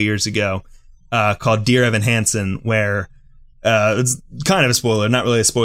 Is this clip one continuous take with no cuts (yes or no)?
yes